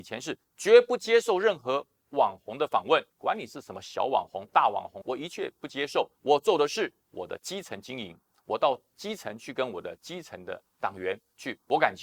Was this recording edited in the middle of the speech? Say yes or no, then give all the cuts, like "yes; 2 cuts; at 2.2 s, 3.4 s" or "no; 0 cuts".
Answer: yes; 4 cuts; at 3.1 s, 5.0 s, 6.1 s, 7.0 s